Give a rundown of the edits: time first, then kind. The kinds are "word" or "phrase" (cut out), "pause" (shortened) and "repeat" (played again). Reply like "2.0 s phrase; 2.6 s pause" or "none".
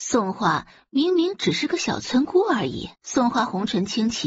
2.9 s pause